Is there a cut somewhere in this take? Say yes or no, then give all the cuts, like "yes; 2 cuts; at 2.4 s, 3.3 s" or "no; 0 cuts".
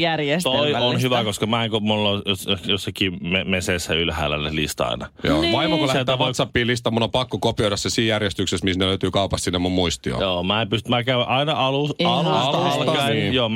no; 0 cuts